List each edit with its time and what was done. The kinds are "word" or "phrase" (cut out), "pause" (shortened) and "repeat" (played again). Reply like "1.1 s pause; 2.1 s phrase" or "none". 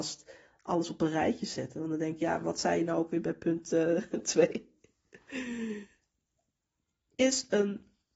none